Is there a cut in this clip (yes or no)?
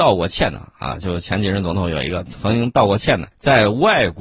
yes